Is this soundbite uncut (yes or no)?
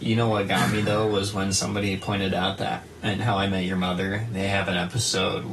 yes